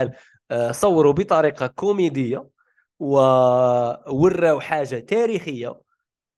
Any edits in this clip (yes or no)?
no